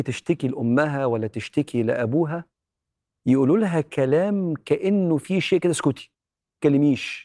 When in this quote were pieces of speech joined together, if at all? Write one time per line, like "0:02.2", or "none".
none